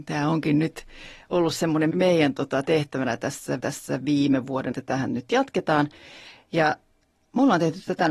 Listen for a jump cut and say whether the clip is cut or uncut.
cut